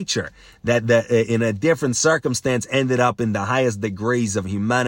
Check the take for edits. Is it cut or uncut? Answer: uncut